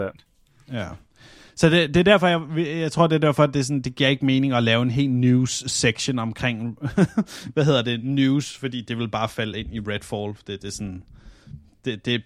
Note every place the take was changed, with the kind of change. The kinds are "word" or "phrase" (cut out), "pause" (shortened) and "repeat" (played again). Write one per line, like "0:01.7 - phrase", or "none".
none